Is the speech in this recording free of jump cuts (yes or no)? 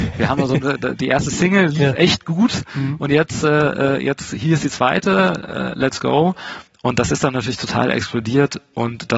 yes